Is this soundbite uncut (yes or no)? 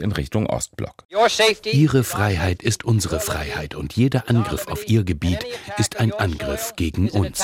yes